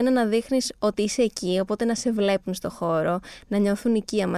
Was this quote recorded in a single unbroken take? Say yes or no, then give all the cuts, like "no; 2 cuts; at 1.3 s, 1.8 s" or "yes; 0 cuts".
yes; 0 cuts